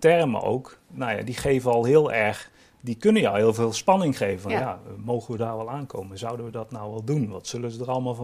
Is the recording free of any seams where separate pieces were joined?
yes; 0 cuts

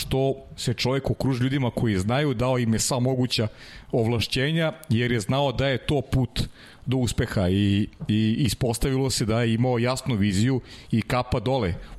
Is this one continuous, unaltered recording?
yes; 0 cuts

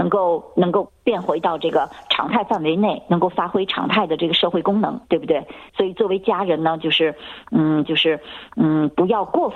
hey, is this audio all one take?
no; 2 cuts; at 5.7 s, 7.8 s

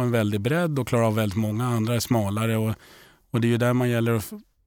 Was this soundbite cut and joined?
no; 0 cuts

